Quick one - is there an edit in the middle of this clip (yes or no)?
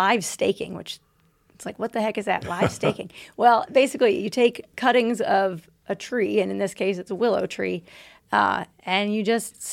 no